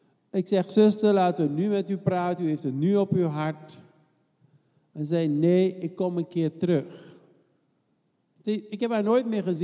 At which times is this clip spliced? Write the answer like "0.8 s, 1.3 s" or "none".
none